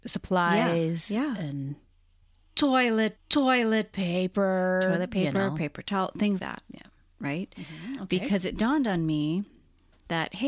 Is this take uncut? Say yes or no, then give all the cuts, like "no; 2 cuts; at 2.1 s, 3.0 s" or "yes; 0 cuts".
no; 2 cuts; at 3.2 s, 6.4 s